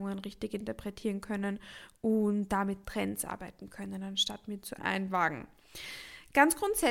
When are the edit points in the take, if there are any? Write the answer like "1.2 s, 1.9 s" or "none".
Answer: 4.8 s